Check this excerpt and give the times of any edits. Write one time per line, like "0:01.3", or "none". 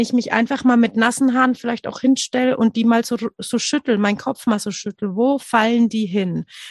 none